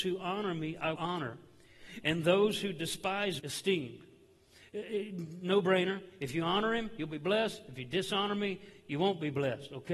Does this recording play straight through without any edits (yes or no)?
no